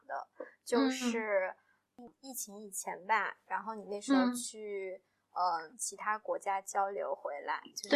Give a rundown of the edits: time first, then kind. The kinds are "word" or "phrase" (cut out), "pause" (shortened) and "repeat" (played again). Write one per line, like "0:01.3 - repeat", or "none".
none